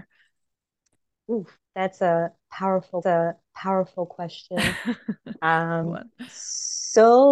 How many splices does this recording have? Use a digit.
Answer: 3